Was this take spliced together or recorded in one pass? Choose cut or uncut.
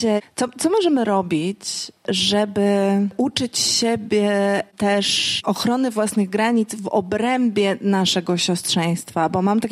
uncut